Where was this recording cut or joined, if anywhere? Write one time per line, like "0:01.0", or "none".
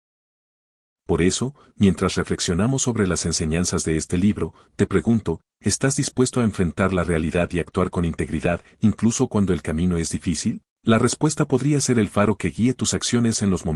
0:10.7